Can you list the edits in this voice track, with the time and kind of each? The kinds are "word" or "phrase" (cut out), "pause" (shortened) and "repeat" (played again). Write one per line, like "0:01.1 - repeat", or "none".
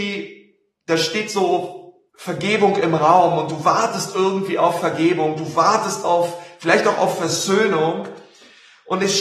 0:02.1 - pause